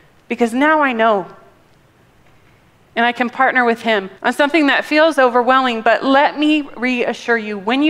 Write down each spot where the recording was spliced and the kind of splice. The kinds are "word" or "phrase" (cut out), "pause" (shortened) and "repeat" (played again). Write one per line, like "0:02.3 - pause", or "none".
0:04.2 - pause